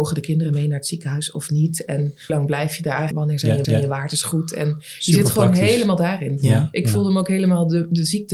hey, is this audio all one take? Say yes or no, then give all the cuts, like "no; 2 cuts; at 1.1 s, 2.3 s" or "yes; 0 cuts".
no; 3 cuts; at 2.3 s, 3.1 s, 3.6 s